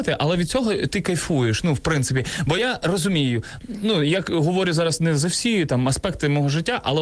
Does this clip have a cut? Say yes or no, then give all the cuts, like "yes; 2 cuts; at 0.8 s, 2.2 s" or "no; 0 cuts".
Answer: no; 0 cuts